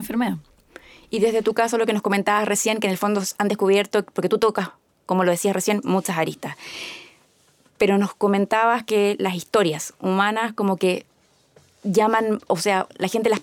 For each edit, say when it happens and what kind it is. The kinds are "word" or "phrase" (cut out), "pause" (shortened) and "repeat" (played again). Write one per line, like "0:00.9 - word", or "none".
0:05.8 - word